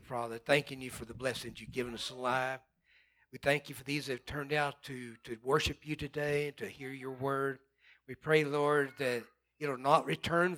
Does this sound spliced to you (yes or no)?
no